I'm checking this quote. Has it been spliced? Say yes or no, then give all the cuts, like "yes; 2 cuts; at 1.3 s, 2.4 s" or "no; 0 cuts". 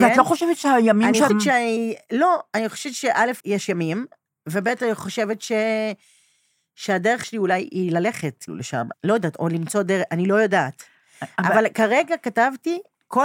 yes; 5 cuts; at 1.3 s, 3.4 s, 7.2 s, 8.5 s, 8.9 s